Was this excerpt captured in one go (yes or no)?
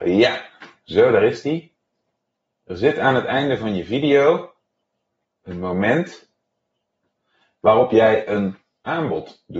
yes